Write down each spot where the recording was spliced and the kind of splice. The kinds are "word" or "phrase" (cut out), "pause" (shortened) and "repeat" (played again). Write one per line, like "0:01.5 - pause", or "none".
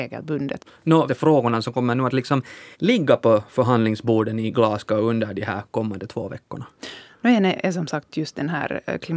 0:01.1 - phrase
0:02.7 - pause